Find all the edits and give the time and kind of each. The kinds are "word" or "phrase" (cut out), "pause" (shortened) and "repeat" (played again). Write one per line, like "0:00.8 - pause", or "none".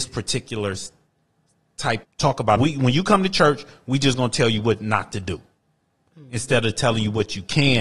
0:02.0 - phrase
0:02.6 - phrase

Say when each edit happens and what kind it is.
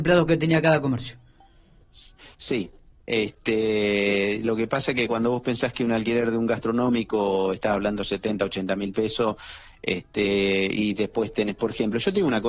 none

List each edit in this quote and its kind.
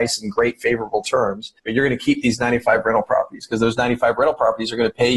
0:01.6 - pause

